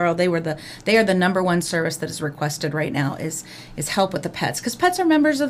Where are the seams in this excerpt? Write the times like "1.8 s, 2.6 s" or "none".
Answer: none